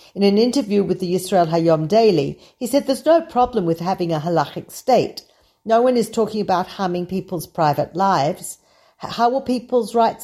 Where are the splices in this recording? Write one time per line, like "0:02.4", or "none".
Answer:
none